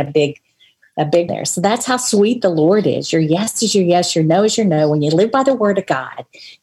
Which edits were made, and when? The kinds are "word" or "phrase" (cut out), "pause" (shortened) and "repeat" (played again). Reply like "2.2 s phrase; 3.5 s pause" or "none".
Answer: 1.3 s word